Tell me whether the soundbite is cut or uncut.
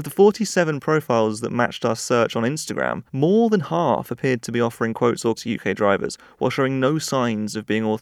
cut